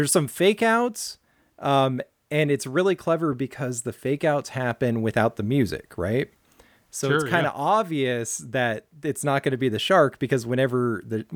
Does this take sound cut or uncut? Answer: uncut